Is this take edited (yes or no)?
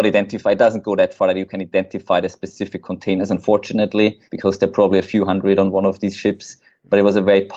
yes